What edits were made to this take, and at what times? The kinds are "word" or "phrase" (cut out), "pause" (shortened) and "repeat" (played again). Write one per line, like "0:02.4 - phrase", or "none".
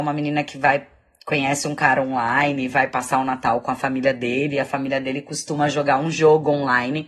none